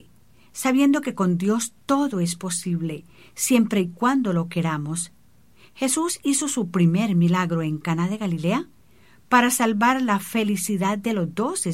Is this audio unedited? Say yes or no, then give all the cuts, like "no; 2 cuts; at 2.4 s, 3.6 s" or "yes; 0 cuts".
yes; 0 cuts